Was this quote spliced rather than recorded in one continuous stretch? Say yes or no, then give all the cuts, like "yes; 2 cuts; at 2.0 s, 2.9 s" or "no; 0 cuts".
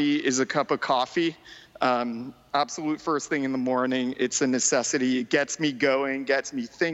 no; 0 cuts